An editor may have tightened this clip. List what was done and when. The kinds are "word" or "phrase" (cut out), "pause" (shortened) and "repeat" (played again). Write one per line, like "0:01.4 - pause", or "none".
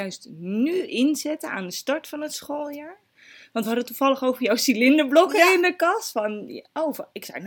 none